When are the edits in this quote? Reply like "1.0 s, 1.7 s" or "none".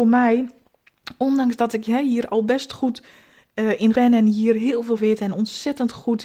3.9 s, 5.0 s